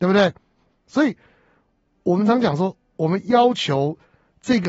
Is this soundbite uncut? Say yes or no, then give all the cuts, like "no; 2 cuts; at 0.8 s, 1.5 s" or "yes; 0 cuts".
yes; 0 cuts